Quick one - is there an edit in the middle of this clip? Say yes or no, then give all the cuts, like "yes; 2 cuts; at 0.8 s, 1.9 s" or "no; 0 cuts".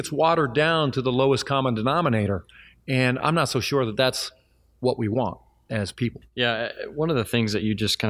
no; 0 cuts